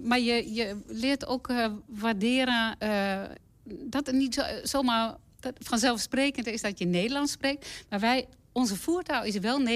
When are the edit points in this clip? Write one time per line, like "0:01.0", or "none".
none